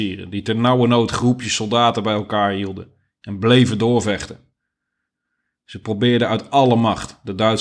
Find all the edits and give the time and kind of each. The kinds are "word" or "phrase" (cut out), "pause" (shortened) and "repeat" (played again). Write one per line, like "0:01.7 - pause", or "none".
none